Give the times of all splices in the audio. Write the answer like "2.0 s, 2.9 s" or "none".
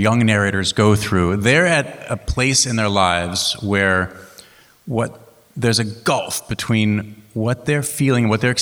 none

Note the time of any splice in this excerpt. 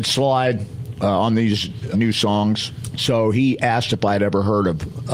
1.9 s

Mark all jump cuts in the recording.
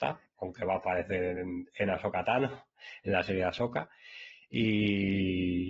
none

